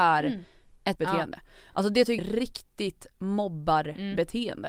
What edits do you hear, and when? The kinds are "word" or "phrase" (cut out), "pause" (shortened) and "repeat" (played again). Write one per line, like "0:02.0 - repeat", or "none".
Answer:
0:01.0 - word
0:02.2 - word